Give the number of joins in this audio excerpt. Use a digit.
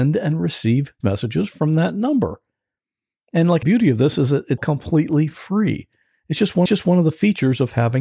4